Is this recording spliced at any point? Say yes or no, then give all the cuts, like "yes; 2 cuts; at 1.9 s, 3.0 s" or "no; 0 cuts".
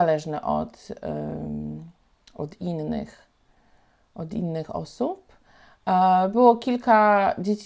no; 0 cuts